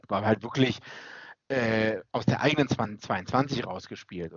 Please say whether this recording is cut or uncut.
uncut